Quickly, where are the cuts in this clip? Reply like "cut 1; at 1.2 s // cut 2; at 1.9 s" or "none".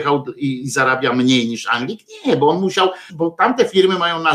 cut 1; at 3.1 s